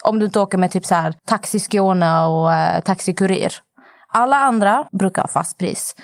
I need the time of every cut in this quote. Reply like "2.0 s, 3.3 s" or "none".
1.2 s, 4.9 s